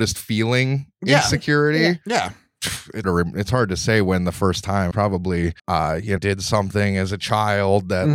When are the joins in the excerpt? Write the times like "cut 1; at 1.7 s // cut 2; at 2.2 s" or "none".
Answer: cut 1; at 3.0 s // cut 2; at 4.9 s // cut 3; at 5.6 s // cut 4; at 6.2 s